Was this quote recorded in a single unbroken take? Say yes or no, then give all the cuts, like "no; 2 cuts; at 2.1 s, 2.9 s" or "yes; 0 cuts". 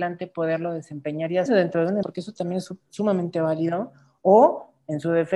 no; 2 cuts; at 1.5 s, 2.0 s